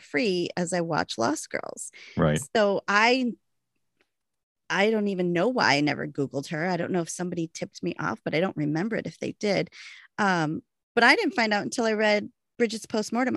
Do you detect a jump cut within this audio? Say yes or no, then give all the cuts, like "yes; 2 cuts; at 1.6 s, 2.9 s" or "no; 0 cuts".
no; 0 cuts